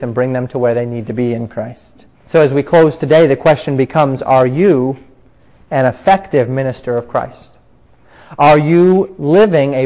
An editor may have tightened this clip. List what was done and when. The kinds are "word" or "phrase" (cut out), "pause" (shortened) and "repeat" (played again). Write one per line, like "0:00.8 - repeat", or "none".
0:02.1 - pause